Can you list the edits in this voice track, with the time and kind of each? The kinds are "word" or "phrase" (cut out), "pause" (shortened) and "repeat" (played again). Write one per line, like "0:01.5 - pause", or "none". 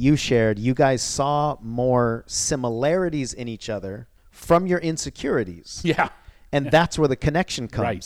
0:04.2 - pause